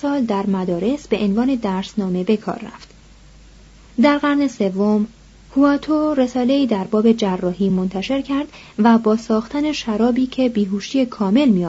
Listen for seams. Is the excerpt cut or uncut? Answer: uncut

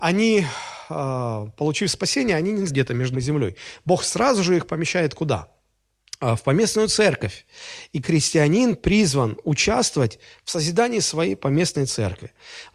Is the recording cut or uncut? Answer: cut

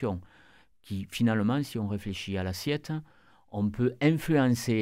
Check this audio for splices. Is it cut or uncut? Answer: uncut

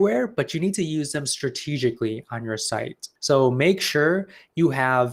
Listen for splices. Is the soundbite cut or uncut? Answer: cut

